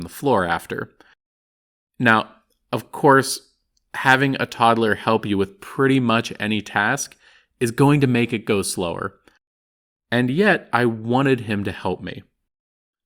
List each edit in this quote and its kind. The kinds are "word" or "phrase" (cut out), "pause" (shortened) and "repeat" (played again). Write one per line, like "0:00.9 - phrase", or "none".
none